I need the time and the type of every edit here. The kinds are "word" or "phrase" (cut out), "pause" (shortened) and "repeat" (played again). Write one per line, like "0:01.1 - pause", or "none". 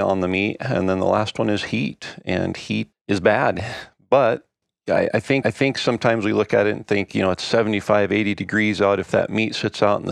0:02.9 - word
0:04.6 - pause
0:05.4 - repeat